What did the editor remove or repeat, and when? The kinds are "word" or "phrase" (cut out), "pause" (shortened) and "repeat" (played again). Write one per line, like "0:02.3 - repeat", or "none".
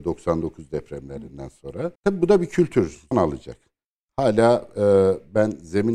0:02.0 - pause
0:03.1 - word